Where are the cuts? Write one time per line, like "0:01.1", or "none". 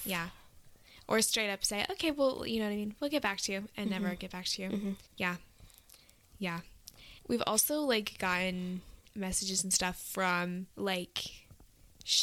0:05.1
0:07.2
0:10.7